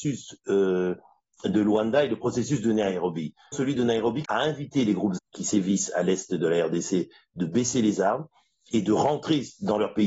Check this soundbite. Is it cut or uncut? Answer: cut